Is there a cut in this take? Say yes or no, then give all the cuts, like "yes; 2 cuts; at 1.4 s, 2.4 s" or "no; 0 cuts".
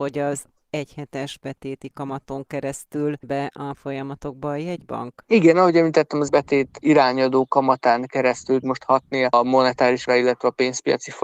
yes; 5 cuts; at 3.2 s, 3.7 s, 6.3 s, 8.6 s, 10.1 s